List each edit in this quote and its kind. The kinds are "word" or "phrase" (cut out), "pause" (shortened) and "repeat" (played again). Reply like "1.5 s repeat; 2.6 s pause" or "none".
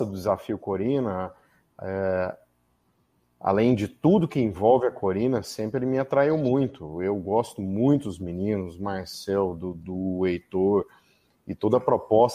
none